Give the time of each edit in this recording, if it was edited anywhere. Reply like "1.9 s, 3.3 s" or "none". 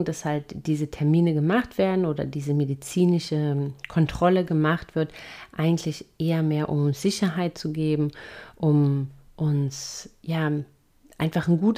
none